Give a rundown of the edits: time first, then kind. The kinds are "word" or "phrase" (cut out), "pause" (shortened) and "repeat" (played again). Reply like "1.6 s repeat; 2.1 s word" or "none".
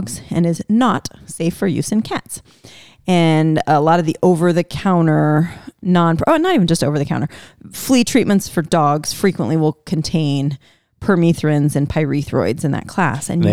none

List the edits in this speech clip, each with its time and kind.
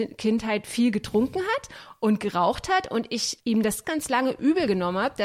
3.8 s word

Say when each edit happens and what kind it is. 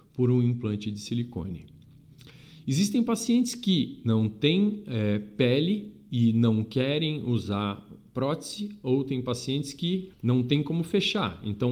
10.1 s pause

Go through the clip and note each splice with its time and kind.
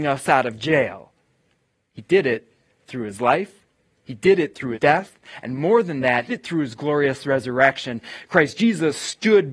4.7 s word; 6.3 s word

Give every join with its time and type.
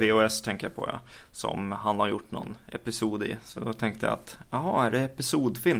none

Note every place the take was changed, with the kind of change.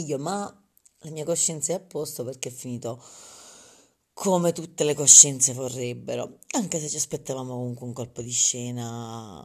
none

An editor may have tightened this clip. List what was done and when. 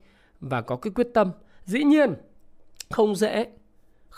none

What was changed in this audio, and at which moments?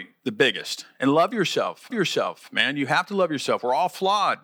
1.9 s repeat

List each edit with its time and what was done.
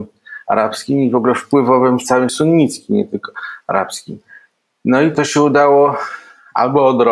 2.3 s word; 5.1 s phrase

